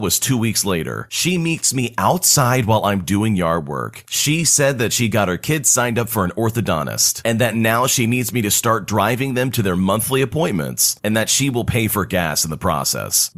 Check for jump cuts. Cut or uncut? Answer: uncut